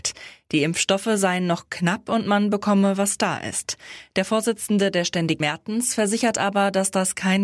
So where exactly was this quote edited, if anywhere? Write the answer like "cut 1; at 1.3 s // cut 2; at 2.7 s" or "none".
cut 1; at 5.4 s

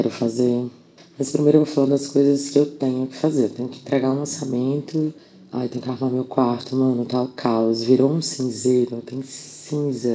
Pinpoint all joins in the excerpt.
none

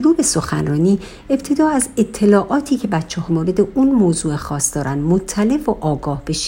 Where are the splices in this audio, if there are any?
cut 1; at 3.3 s

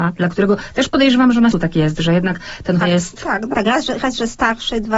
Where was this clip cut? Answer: cut 1; at 1.5 s // cut 2; at 2.8 s // cut 3; at 3.5 s

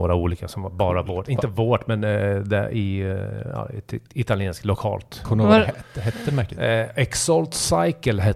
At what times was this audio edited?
none

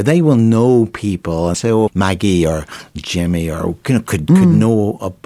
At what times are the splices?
cut 1; at 1.5 s // cut 2; at 1.9 s

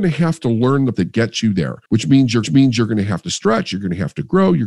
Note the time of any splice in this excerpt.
cut 1; at 0.9 s // cut 2; at 1.8 s // cut 3; at 2.4 s

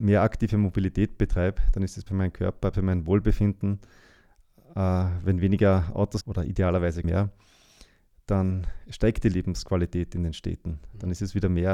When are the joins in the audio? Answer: cut 1; at 2.1 s // cut 2; at 2.7 s // cut 3; at 6.2 s // cut 4; at 7.0 s

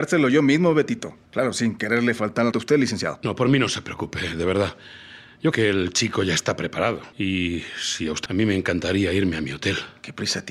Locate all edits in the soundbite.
cut 1; at 1.3 s // cut 2; at 2.5 s // cut 3; at 5.5 s // cut 4; at 7.1 s // cut 5; at 8.3 s

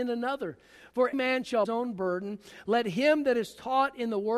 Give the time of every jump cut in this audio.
cut 1; at 1.1 s // cut 2; at 1.6 s

